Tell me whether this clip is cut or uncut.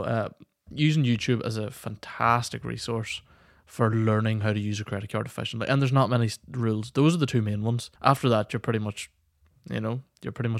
cut